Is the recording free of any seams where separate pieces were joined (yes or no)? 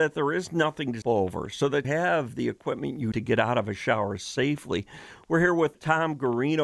no